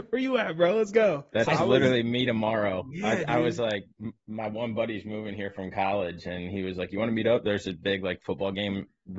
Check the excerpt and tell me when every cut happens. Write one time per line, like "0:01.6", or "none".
0:01.3